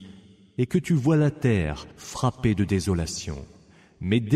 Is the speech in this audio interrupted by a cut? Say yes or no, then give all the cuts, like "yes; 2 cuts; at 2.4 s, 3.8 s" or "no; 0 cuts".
yes; 1 cut; at 1.9 s